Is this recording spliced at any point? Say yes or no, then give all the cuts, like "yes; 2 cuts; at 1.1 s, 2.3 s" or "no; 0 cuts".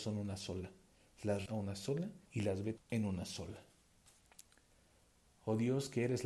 yes; 3 cuts; at 1.5 s, 2.3 s, 2.8 s